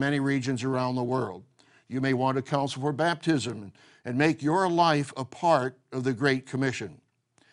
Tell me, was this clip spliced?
no; 0 cuts

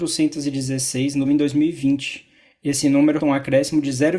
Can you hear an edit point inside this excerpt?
yes; 2 cuts; at 1.3 s, 3.2 s

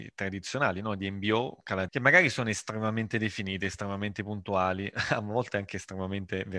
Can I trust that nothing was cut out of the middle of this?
no; 1 cut; at 1.9 s

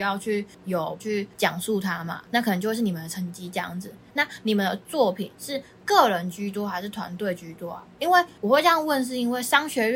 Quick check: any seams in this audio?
yes; 2 cuts; at 1.0 s, 5.3 s

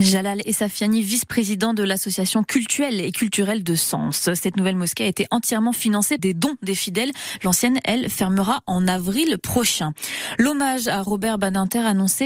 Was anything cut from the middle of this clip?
yes; 1 cut; at 6.2 s

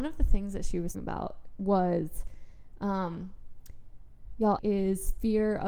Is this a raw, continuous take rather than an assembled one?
no; 2 cuts; at 0.9 s, 4.6 s

